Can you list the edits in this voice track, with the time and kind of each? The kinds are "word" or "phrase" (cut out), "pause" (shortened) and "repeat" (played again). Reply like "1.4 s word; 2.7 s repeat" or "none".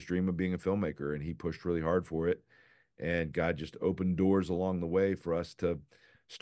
none